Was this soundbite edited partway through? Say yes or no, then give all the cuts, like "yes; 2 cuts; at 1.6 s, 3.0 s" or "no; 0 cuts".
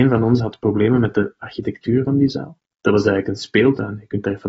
yes; 1 cut; at 2.7 s